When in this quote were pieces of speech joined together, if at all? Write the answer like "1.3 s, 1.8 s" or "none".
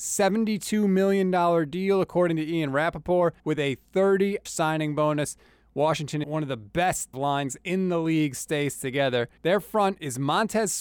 3.4 s, 4.5 s, 6.2 s, 7.1 s, 9.4 s